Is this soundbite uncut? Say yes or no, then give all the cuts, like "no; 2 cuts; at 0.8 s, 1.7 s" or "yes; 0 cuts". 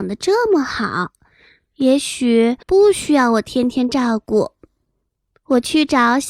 no; 1 cut; at 2.6 s